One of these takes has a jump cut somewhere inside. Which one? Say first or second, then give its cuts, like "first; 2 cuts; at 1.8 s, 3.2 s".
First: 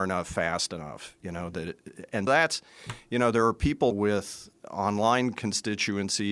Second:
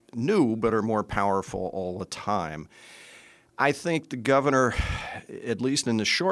first; 2 cuts; at 2.3 s, 3.9 s